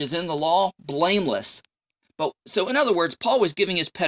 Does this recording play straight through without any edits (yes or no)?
yes